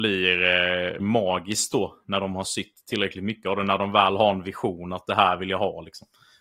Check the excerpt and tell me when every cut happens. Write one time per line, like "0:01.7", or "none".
0:01.0